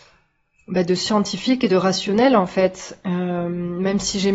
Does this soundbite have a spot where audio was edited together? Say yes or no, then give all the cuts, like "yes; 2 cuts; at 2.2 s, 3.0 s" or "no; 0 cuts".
no; 0 cuts